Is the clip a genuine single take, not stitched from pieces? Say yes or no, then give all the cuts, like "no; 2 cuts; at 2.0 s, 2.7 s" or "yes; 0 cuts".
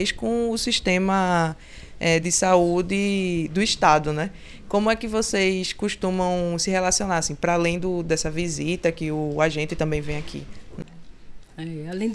yes; 0 cuts